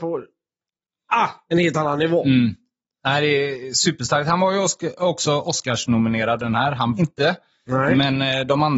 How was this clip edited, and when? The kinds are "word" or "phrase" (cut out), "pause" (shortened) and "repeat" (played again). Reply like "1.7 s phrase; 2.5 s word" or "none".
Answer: 6.4 s word; 7.0 s word